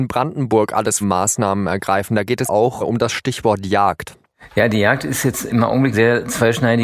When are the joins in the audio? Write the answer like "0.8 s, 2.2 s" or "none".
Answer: 1.0 s, 2.5 s, 2.8 s, 5.5 s, 5.9 s